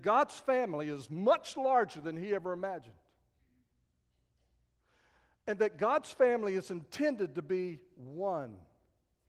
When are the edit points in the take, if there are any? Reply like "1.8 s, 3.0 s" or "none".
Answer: none